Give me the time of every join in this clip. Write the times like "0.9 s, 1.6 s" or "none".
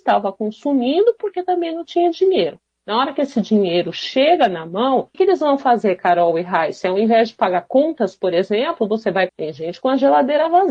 5.1 s, 9.3 s

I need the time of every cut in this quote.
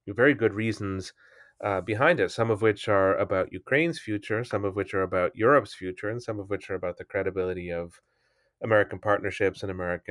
none

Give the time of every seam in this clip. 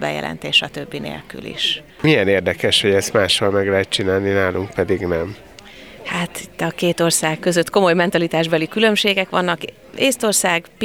1.9 s

